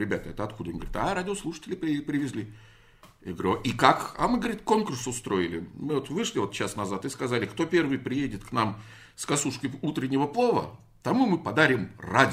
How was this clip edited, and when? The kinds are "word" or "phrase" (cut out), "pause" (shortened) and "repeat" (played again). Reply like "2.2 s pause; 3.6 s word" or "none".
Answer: none